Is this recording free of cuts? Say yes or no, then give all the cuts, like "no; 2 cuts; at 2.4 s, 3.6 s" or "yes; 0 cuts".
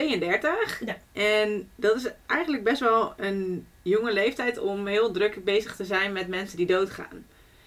no; 2 cuts; at 1.0 s, 3.8 s